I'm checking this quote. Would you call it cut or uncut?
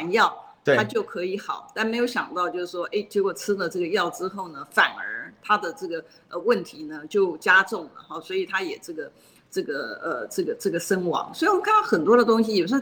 uncut